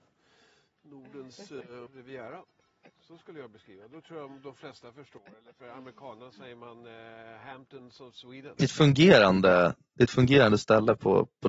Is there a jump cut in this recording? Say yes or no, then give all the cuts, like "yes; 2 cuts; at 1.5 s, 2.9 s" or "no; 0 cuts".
yes; 1 cut; at 1.9 s